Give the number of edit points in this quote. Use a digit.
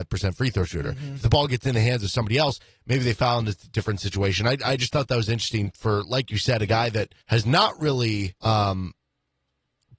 2